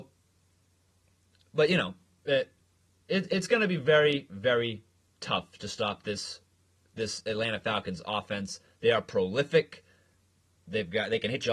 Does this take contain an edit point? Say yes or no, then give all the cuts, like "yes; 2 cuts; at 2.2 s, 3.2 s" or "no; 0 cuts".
no; 0 cuts